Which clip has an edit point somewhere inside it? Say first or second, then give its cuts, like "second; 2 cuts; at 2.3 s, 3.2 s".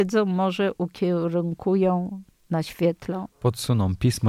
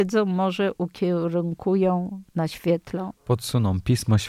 second; 1 cut; at 2.3 s